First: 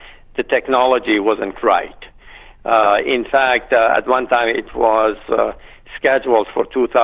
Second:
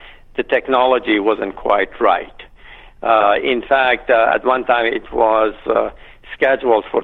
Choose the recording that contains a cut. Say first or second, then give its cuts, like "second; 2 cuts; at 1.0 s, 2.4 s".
first; 1 cut; at 1.5 s